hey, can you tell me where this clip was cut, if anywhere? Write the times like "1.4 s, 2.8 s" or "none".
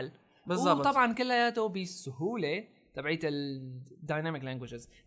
none